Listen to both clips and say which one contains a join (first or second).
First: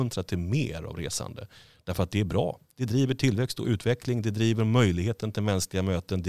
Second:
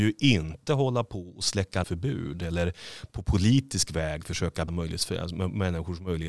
second